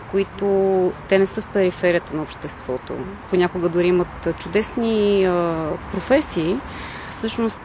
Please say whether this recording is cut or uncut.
uncut